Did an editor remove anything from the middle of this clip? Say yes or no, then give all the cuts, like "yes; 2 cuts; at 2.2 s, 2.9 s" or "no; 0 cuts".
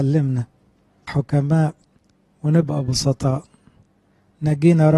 yes; 1 cut; at 1.1 s